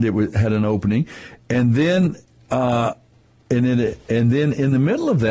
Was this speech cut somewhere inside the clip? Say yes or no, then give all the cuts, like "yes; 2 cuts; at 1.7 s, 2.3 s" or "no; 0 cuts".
no; 0 cuts